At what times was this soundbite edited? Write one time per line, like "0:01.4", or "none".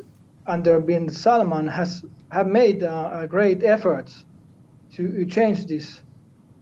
none